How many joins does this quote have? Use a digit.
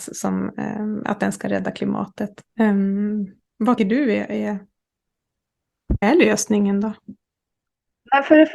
3